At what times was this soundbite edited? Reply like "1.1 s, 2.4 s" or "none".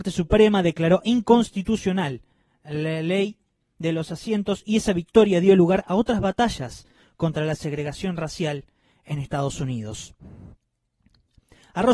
none